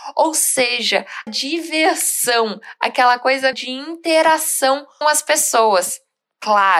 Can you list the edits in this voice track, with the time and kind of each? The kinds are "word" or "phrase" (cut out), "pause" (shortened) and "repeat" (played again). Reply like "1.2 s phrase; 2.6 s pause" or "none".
1.3 s word; 3.5 s word; 5.0 s word